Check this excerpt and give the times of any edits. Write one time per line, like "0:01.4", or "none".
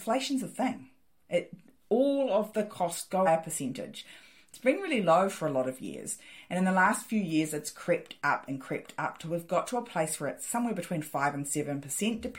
0:03.3